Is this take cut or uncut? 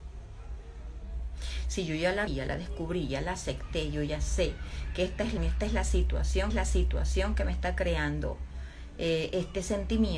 cut